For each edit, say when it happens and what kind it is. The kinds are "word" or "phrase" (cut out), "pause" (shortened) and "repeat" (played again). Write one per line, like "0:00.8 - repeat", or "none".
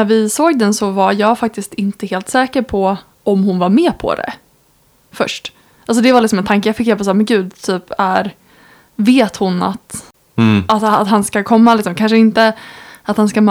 none